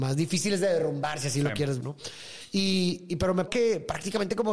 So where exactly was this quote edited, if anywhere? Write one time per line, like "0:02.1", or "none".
0:01.8
0:03.5